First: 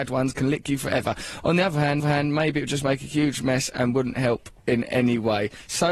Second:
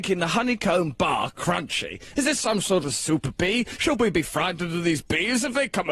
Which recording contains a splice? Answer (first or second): first